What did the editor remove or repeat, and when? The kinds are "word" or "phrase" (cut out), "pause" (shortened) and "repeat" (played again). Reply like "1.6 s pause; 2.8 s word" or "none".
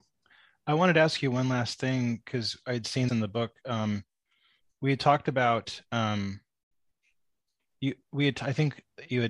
3.1 s word